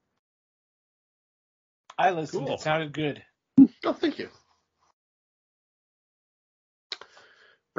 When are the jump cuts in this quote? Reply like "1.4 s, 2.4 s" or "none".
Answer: none